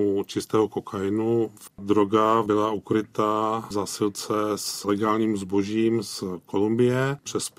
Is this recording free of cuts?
yes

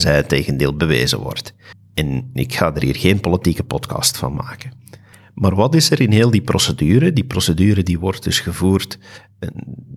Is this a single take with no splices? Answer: yes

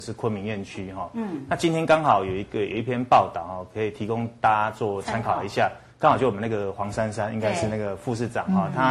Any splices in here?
yes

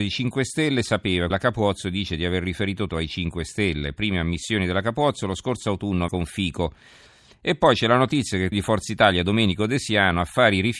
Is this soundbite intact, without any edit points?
no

